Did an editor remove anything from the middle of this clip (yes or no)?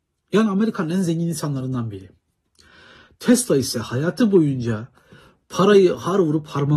no